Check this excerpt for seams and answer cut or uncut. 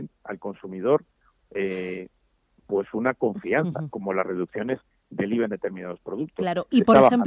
uncut